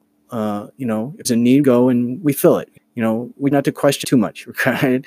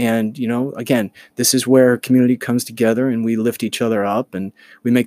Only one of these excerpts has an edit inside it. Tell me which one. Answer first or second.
first